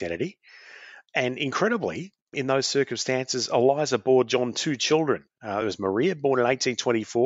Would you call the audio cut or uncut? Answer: uncut